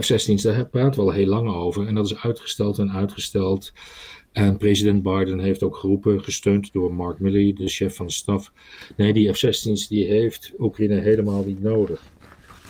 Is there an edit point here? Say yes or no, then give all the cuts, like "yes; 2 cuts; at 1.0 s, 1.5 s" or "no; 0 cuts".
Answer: no; 0 cuts